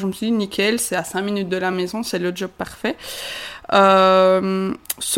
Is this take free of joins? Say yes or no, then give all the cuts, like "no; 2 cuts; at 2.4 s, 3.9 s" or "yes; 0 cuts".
yes; 0 cuts